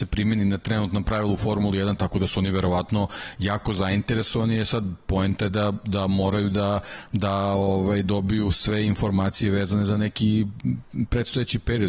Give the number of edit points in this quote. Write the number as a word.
zero